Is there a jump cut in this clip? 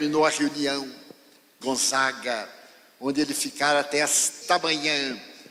yes; 2 cuts; at 1.6 s, 4.4 s

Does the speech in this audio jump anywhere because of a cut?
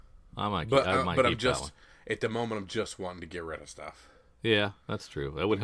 no; 0 cuts

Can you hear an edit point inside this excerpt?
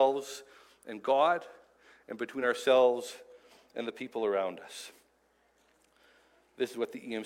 no; 0 cuts

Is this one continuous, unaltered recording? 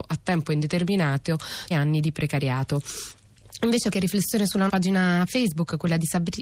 no; 3 cuts; at 1.7 s, 3.9 s, 4.7 s

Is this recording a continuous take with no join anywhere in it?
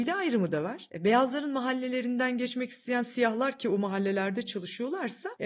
yes; 0 cuts

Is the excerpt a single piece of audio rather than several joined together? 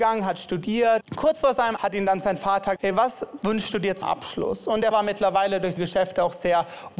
no; 6 cuts; at 1.0 s, 1.8 s, 2.8 s, 4.0 s, 4.9 s, 5.8 s

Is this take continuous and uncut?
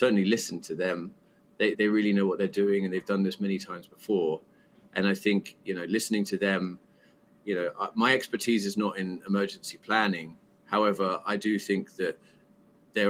no; 1 cut; at 1.7 s

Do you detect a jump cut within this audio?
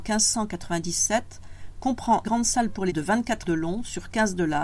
yes; 3 cuts; at 2.2 s, 2.9 s, 3.4 s

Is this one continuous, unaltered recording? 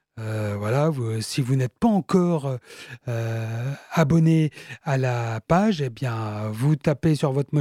yes; 0 cuts

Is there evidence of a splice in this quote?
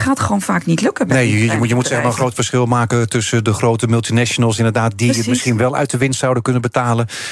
no; 0 cuts

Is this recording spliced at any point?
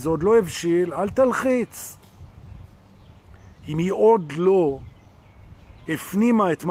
no; 0 cuts

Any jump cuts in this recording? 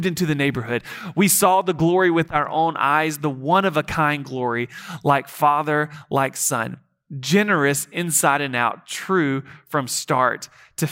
no; 0 cuts

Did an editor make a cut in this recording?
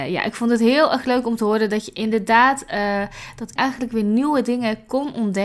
yes; 1 cut; at 3.6 s

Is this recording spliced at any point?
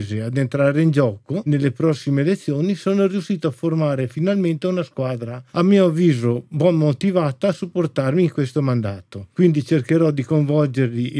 no; 0 cuts

